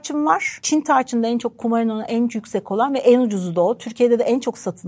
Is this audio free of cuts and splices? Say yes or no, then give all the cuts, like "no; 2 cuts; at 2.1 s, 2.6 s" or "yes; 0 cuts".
yes; 0 cuts